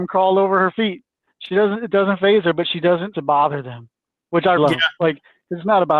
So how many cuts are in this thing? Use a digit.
2